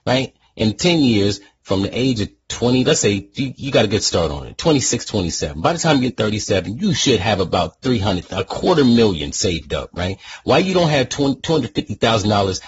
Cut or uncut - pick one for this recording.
uncut